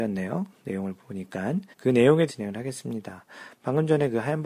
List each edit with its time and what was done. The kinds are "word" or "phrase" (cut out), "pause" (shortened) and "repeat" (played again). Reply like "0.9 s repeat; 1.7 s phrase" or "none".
1.7 s pause; 2.3 s word